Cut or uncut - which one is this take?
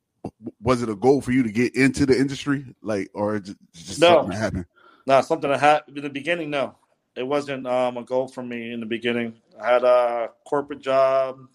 uncut